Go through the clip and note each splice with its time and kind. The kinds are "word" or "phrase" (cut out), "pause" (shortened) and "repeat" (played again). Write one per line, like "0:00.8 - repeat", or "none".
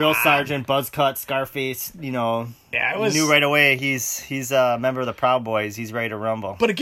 none